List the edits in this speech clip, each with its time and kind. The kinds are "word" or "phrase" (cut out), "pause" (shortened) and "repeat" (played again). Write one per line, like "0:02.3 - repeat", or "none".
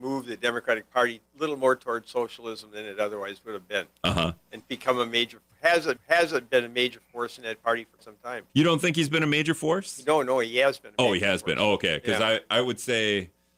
0:01.3 - word
0:04.6 - word
0:06.0 - repeat
0:08.0 - word
0:08.5 - pause